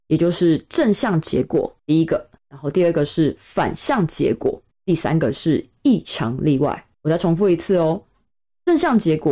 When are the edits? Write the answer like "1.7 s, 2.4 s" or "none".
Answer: 1.8 s, 2.4 s, 4.7 s, 6.9 s